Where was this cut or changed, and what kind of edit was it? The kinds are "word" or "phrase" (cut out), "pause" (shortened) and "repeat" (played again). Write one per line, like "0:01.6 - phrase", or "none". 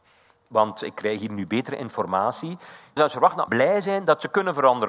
0:03.0 - word
0:03.5 - word